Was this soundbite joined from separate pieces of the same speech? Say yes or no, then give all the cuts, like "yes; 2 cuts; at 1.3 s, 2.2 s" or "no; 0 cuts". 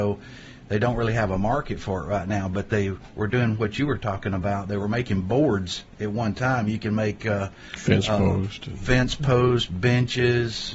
no; 0 cuts